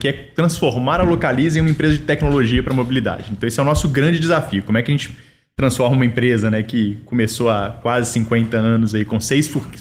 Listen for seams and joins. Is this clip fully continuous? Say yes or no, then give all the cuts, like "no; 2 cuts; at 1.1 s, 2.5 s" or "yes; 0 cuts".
yes; 0 cuts